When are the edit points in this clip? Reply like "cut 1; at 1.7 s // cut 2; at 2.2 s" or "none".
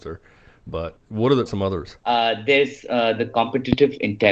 cut 1; at 1.0 s // cut 2; at 1.5 s // cut 3; at 2.0 s